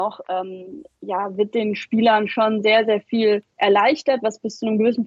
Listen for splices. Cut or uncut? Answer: cut